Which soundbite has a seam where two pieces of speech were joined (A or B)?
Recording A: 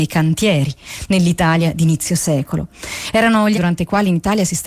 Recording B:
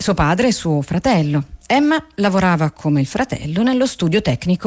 A